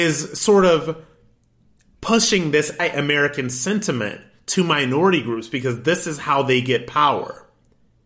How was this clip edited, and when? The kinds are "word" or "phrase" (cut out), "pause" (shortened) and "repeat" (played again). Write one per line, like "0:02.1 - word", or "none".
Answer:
0:02.8 - word